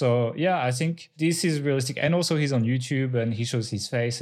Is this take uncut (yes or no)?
yes